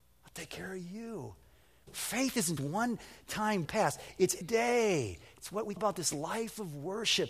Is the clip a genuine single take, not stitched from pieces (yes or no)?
no